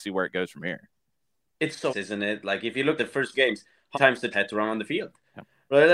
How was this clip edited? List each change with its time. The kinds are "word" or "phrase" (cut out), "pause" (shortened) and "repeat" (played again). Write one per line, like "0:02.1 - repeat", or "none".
0:01.9 - word
0:03.0 - word
0:03.3 - word
0:03.9 - word
0:04.3 - word